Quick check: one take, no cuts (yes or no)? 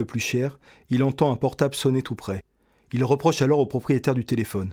yes